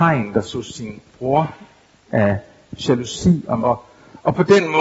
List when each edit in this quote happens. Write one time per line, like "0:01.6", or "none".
0:02.1
0:03.6